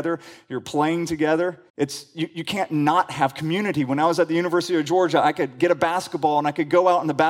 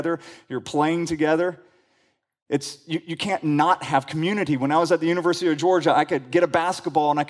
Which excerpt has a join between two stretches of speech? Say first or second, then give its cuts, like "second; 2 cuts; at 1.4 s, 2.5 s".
first; 1 cut; at 1.7 s